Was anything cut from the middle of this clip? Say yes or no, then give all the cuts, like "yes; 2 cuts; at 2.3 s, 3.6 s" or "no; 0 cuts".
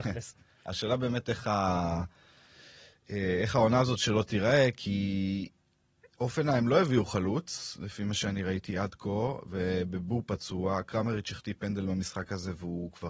no; 0 cuts